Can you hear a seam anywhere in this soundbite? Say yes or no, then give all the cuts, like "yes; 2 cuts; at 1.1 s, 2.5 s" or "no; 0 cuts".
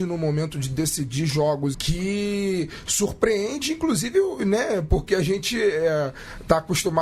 yes; 1 cut; at 1.7 s